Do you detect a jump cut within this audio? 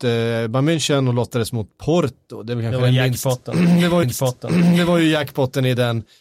yes; 1 cut; at 4.0 s

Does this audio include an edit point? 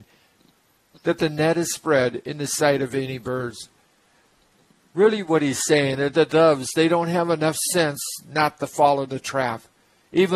no; 0 cuts

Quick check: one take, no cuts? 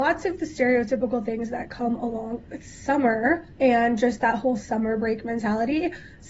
no; 1 cut; at 3.5 s

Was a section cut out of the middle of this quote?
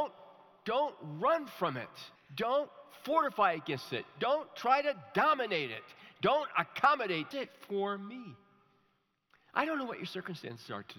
yes; 2 cuts; at 2.1 s, 7.3 s

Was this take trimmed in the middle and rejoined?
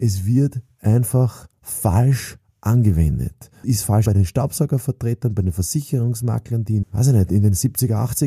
yes; 3 cuts; at 3.6 s, 4.1 s, 6.8 s

